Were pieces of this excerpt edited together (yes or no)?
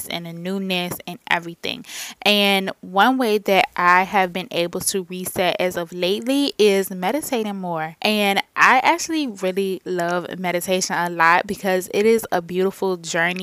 no